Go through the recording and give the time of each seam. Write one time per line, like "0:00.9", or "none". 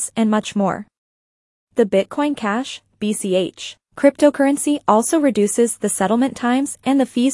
none